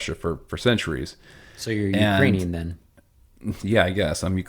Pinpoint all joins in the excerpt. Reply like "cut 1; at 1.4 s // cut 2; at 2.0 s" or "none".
none